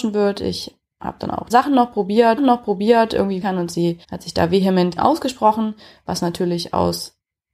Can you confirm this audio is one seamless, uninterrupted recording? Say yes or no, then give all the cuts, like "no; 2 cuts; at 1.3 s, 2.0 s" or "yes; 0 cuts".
no; 5 cuts; at 1.5 s, 2.4 s, 3.4 s, 4.0 s, 5.0 s